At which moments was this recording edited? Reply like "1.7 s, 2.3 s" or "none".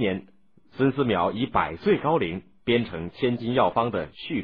none